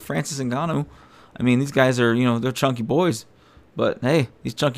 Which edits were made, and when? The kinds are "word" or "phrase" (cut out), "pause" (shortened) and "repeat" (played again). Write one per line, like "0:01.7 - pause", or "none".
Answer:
none